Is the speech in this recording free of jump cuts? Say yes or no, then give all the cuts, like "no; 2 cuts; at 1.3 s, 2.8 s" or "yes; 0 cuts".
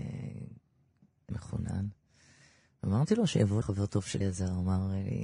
no; 3 cuts; at 1.3 s, 3.6 s, 4.2 s